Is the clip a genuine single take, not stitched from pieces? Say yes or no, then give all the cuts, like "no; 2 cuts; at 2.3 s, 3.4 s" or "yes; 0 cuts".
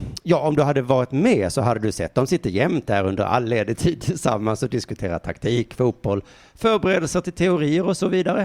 yes; 0 cuts